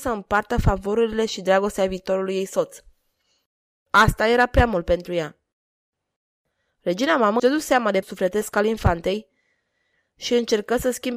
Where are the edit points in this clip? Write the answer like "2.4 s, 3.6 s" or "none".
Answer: 7.4 s, 8.0 s